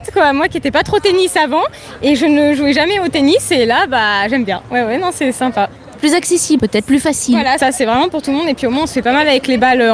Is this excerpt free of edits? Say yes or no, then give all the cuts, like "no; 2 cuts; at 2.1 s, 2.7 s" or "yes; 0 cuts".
no; 2 cuts; at 6.6 s, 7.6 s